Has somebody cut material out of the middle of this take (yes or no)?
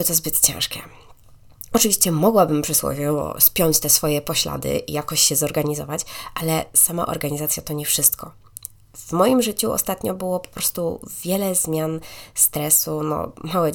no